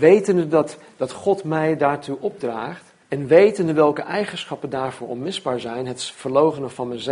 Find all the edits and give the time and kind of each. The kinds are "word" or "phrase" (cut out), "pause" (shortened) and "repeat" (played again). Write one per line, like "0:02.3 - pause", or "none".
0:03.0 - pause